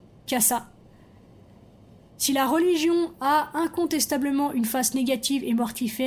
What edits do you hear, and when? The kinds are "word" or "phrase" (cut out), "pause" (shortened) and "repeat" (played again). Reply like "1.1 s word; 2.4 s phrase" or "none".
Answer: none